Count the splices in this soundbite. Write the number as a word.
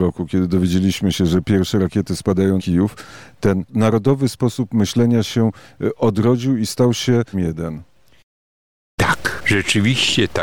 three